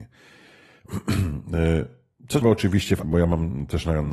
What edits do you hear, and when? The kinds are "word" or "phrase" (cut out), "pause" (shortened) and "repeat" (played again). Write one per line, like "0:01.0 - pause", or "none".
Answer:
0:02.4 - word
0:03.0 - word